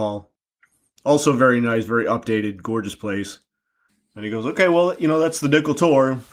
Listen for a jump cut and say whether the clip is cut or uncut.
cut